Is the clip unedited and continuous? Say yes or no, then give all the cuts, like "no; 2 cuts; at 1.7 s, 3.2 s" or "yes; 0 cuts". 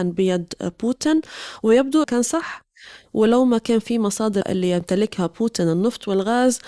no; 2 cuts; at 2.0 s, 4.4 s